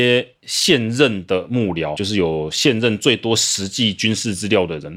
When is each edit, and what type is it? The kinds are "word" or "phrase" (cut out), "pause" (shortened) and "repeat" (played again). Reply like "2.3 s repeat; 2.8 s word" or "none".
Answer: 2.0 s word